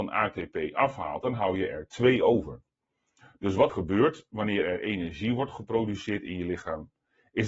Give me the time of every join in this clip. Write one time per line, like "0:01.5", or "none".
0:03.7